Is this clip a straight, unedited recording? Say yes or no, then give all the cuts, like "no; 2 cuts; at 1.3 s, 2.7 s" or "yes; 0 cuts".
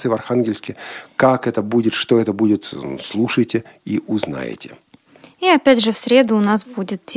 yes; 0 cuts